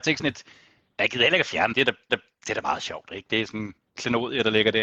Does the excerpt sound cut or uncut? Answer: cut